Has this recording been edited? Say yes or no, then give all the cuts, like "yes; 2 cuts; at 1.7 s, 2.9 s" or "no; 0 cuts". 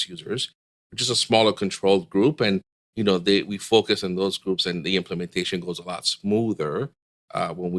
no; 0 cuts